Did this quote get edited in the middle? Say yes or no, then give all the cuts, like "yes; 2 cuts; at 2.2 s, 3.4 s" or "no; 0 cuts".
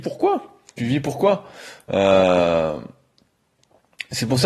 no; 0 cuts